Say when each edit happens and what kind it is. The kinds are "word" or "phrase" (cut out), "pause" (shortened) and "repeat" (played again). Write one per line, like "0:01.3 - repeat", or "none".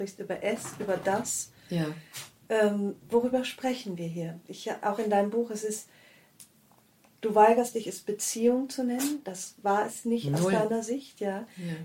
none